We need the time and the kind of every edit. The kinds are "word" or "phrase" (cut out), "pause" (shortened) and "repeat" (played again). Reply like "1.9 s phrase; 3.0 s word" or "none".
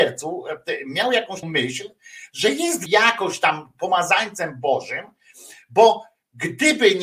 1.4 s word; 2.9 s word